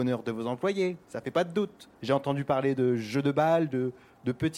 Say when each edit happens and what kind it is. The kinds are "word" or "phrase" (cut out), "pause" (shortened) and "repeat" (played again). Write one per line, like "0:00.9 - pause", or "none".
0:02.0 - pause